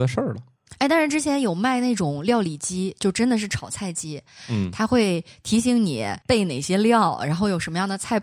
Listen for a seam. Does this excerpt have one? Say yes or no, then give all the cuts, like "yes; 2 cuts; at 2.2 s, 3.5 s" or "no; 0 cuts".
yes; 1 cut; at 6.2 s